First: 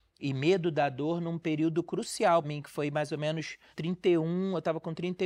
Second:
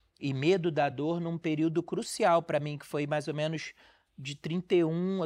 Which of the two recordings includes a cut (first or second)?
first